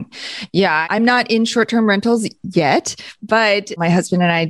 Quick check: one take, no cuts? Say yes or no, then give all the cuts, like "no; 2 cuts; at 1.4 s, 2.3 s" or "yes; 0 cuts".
yes; 0 cuts